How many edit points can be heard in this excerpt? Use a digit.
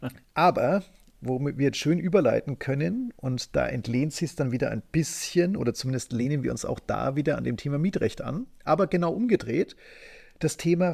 0